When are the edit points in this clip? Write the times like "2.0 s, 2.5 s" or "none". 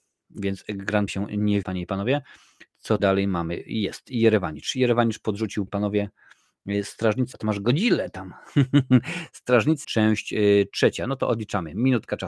1.1 s, 1.6 s, 3.0 s, 5.7 s, 7.3 s, 9.8 s